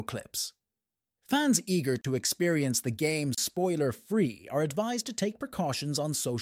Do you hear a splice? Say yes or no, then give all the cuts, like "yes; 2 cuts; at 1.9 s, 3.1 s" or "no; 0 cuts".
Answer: no; 0 cuts